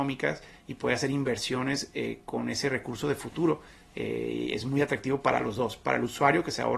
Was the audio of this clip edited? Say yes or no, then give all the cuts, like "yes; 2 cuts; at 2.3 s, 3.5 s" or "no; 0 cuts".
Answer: no; 0 cuts